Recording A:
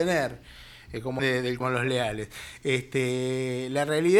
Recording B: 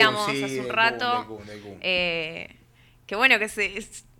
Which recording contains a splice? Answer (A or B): A